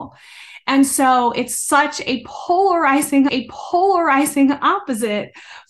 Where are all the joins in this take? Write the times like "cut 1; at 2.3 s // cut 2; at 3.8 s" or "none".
cut 1; at 3.3 s